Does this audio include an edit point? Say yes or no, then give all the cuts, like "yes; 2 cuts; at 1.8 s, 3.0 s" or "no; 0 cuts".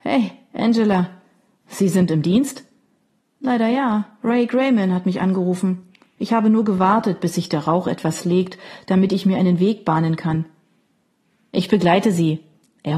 no; 0 cuts